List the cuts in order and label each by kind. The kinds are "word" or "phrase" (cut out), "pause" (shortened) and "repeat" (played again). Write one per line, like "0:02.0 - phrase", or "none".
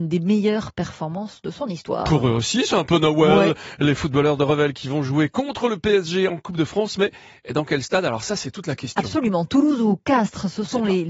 none